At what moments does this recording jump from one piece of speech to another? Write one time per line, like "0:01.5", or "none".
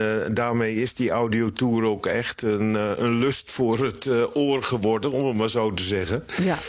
none